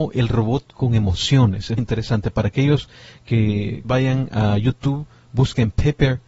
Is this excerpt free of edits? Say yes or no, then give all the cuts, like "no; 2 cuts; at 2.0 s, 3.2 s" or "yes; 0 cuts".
no; 2 cuts; at 1.8 s, 3.8 s